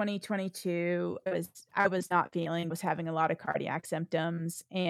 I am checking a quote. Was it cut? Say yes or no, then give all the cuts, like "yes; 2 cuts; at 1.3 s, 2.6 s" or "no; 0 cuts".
yes; 2 cuts; at 1.3 s, 2.7 s